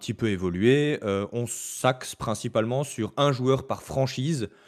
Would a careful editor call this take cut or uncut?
uncut